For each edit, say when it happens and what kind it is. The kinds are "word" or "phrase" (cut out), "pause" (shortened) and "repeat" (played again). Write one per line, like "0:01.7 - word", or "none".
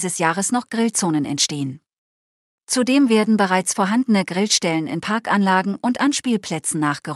none